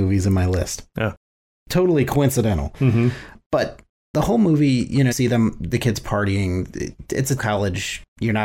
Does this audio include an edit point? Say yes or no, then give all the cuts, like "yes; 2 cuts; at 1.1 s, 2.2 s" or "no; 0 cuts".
yes; 4 cuts; at 4.1 s, 5.1 s, 5.7 s, 7.4 s